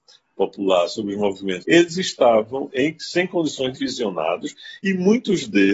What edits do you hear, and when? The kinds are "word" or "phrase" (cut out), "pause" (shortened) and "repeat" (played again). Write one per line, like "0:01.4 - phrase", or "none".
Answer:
0:01.6 - phrase
0:02.7 - word
0:03.8 - word